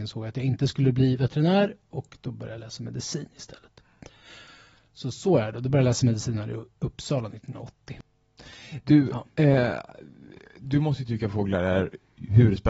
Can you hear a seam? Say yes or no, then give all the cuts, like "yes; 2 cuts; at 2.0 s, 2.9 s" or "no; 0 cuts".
no; 0 cuts